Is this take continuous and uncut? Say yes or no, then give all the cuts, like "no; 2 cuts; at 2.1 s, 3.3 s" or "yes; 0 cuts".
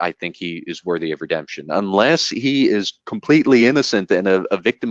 yes; 0 cuts